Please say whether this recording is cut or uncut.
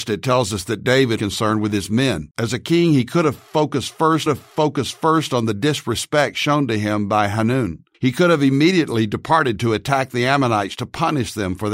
cut